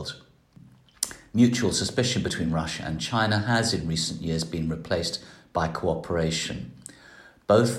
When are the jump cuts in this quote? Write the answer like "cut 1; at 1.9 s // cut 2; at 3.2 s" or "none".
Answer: none